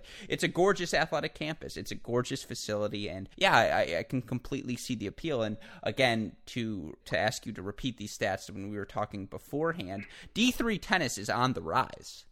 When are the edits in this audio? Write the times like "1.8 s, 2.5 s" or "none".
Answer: 3.3 s, 7.0 s